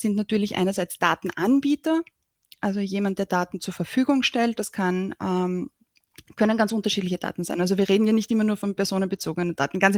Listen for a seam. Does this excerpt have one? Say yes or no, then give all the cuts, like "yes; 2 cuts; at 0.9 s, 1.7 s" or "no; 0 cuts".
no; 0 cuts